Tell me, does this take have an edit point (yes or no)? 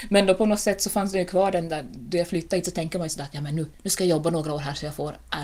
no